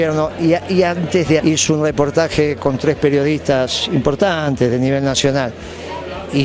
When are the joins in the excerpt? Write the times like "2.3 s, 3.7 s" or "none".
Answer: 1.4 s